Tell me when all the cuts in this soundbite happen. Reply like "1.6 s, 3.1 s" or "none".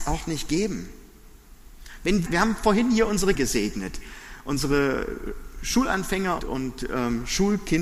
2.3 s, 3.3 s, 6.4 s